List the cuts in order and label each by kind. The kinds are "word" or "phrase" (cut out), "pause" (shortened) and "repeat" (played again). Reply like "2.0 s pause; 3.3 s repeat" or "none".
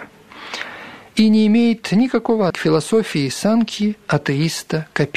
2.5 s word